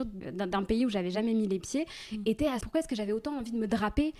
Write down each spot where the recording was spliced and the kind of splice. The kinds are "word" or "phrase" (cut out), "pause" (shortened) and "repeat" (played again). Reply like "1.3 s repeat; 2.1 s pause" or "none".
2.6 s phrase